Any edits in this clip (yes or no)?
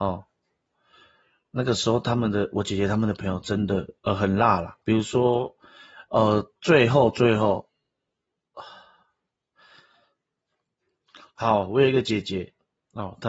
yes